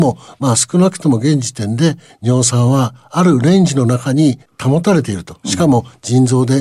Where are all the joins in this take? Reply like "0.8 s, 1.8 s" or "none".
none

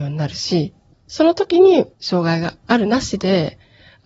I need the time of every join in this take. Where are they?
0.9 s, 1.9 s

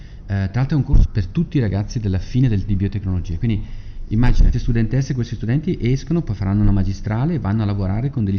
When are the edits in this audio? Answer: 1.0 s, 2.7 s, 4.5 s

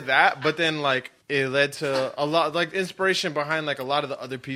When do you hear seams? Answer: 1.2 s

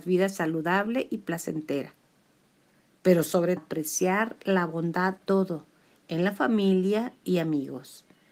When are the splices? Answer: 3.6 s, 5.2 s

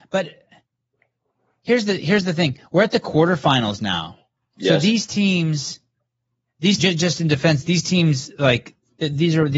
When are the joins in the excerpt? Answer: 4.4 s, 6.8 s

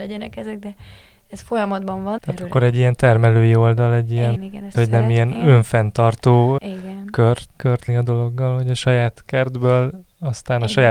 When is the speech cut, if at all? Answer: 2.2 s, 4.4 s, 4.7 s, 6.6 s, 7.6 s, 7.9 s

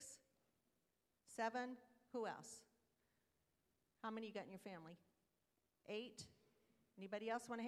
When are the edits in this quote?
none

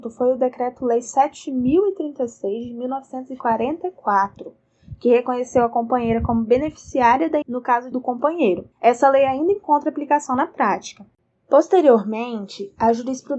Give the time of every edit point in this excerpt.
7.4 s, 7.9 s, 8.7 s

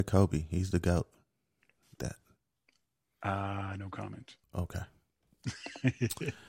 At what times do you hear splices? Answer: 2.0 s, 4.4 s

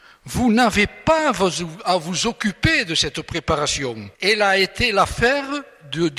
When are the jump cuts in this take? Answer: 4.1 s

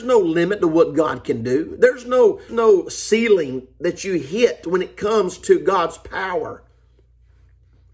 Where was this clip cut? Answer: 2.5 s

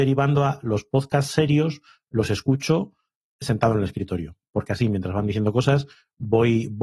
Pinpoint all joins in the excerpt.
none

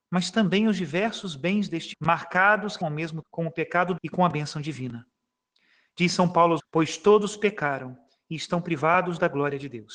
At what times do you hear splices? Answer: 1.9 s, 2.8 s, 3.2 s, 4.0 s, 6.6 s

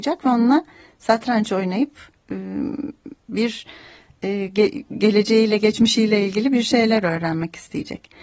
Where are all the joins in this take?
3.2 s

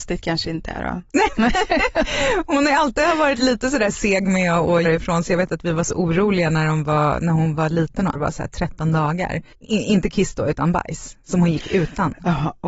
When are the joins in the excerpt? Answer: 4.8 s, 8.1 s, 9.5 s

